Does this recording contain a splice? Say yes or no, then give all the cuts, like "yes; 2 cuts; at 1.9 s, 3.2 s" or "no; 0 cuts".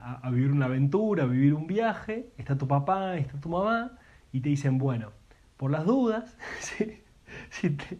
no; 0 cuts